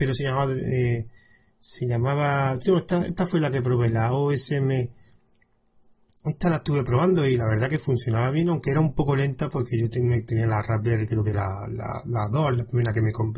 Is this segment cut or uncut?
uncut